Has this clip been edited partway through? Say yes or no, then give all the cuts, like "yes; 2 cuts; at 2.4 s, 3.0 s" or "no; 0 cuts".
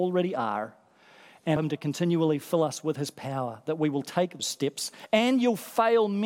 yes; 2 cuts; at 1.6 s, 4.4 s